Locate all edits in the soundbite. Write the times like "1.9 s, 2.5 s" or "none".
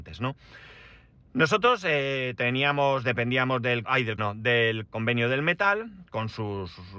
3.8 s, 4.2 s, 4.9 s